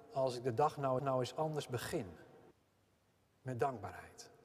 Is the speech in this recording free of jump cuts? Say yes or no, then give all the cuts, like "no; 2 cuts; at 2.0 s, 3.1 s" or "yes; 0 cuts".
no; 2 cuts; at 1.0 s, 2.5 s